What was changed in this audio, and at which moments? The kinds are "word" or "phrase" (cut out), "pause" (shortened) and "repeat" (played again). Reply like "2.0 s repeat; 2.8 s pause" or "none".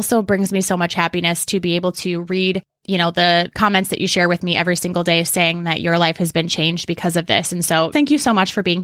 7.9 s word